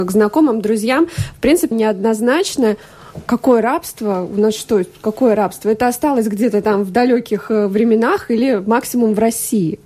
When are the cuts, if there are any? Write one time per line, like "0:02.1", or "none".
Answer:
0:01.7